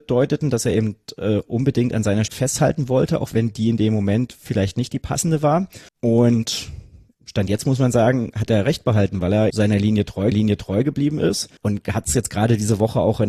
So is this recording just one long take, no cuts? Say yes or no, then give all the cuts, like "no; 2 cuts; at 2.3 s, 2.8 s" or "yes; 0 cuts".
no; 5 cuts; at 2.3 s, 5.9 s, 9.5 s, 10.3 s, 11.6 s